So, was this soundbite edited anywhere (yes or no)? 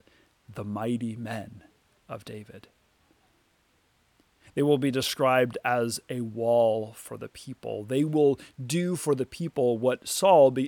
no